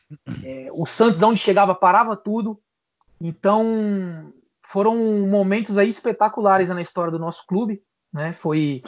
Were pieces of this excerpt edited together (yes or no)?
no